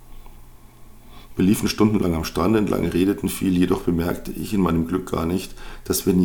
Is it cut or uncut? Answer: uncut